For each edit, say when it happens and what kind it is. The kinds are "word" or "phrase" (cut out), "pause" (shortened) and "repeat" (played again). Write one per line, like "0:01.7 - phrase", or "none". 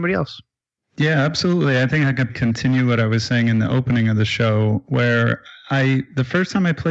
0:02.3 - word